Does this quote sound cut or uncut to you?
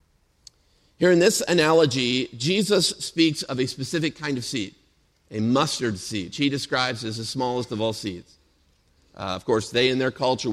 cut